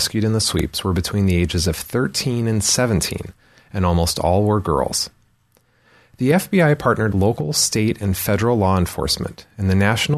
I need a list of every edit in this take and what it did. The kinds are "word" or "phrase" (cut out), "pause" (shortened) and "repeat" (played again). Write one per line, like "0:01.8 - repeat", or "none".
0:07.1 - word

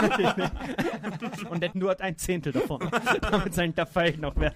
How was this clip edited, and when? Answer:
0:01.7 - phrase

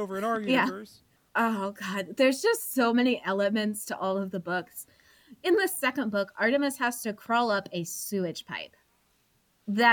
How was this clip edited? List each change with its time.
none

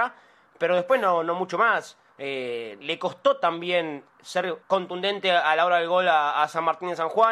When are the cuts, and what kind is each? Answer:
0:02.8 - word
0:04.6 - pause

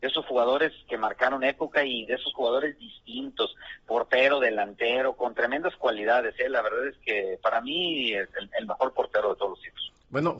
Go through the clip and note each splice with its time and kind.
none

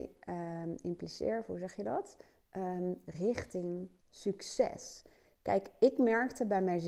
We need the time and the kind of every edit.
0:04.0 - pause

